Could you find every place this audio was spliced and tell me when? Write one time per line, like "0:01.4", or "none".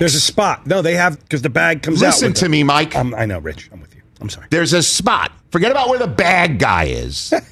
0:01.1
0:04.1
0:05.4

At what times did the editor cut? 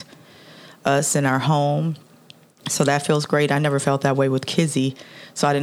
none

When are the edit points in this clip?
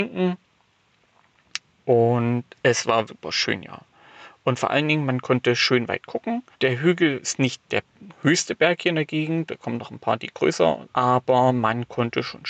0:03.1
0:06.5
0:07.6
0:09.5
0:10.9

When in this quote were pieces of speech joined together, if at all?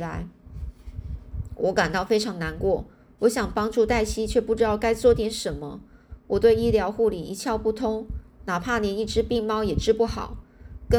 none

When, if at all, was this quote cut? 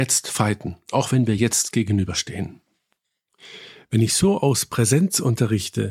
none

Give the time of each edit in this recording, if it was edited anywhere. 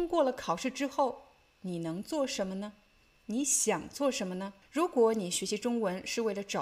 0:04.6

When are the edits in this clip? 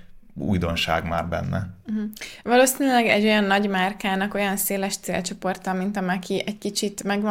none

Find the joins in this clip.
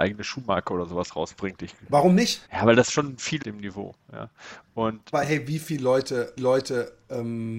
0:02.5
0:03.4
0:05.1
0:06.4

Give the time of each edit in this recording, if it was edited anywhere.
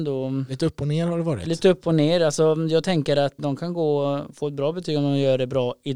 0:03.4

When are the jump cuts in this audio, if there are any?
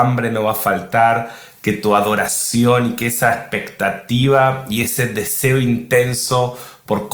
none

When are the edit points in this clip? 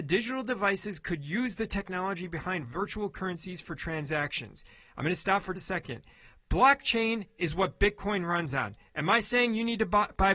0:05.5

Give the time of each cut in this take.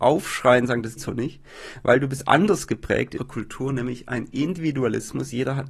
0:01.0
0:03.2

